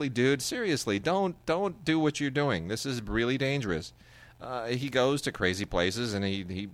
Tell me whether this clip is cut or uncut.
uncut